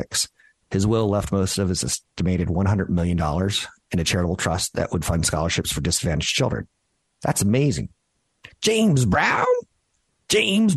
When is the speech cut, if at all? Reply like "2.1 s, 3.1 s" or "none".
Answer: none